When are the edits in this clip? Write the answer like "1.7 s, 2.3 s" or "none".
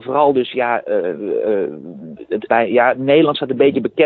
2.5 s